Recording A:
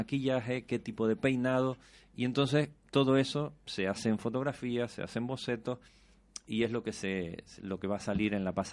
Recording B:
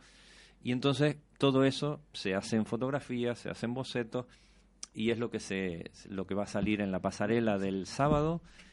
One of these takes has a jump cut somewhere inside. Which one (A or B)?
A